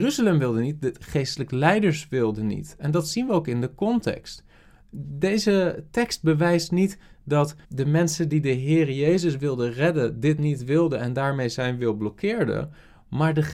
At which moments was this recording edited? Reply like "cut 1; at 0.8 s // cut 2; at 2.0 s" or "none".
cut 1; at 7.6 s